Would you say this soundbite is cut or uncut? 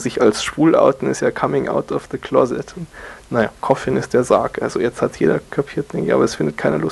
cut